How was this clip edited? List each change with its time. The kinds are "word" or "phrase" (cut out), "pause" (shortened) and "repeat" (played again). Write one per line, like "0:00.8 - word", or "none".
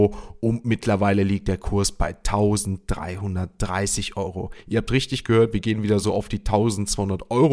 none